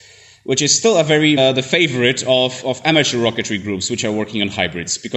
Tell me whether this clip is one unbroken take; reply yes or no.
no